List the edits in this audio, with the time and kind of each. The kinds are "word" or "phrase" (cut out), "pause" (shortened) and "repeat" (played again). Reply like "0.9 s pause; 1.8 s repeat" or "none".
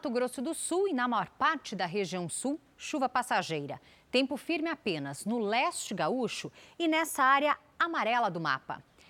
none